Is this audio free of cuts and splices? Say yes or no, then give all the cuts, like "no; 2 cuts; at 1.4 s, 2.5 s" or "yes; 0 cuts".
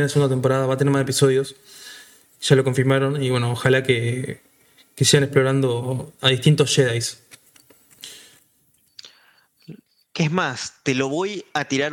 yes; 0 cuts